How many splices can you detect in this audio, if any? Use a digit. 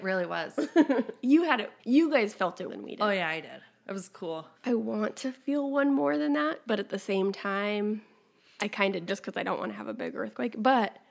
4